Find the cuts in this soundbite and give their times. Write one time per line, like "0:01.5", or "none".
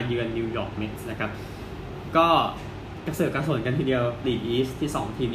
0:04.2